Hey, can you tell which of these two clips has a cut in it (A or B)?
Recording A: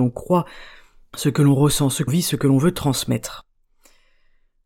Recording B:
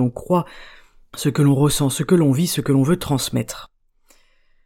A